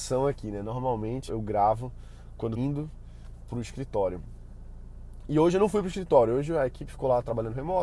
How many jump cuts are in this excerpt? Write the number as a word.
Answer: two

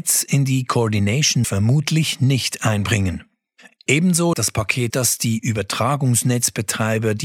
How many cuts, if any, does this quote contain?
three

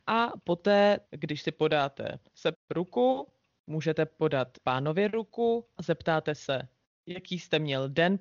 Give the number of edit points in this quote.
four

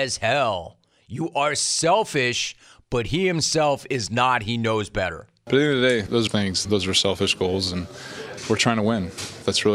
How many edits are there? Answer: one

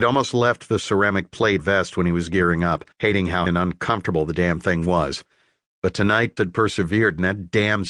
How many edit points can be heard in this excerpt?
four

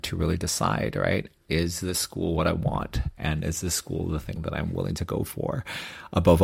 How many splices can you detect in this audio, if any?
zero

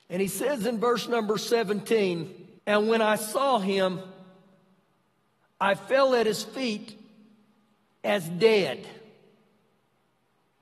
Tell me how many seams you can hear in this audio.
one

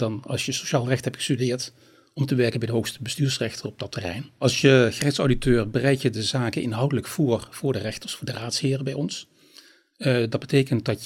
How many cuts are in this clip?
zero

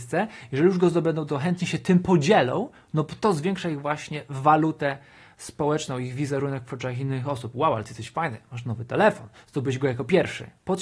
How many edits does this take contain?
zero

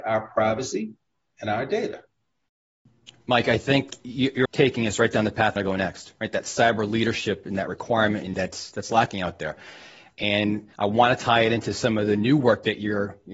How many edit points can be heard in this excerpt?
four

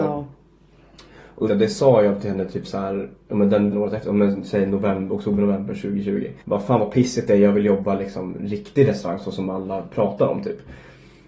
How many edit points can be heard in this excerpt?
three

